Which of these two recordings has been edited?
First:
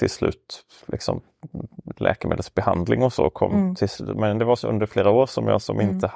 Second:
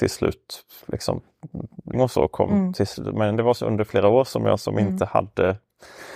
second; 1 cut; at 1.9 s

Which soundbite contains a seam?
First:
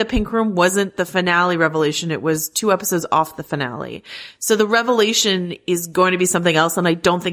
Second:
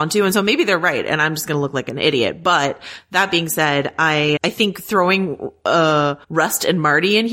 second; 2 cuts; at 4.4 s, 6.2 s

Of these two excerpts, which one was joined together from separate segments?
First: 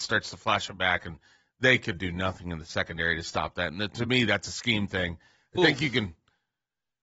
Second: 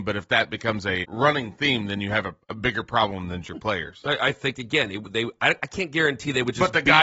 second; 3 cuts; at 1.0 s, 2.4 s, 3.4 s

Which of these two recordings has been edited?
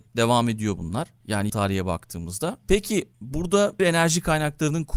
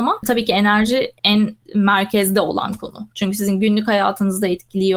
first; 2 cuts; at 1.5 s, 3.8 s

